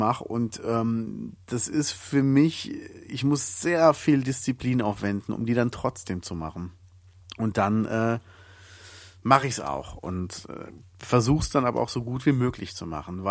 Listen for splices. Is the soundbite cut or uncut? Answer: uncut